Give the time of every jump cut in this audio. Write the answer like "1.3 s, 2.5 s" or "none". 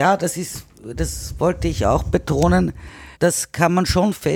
3.1 s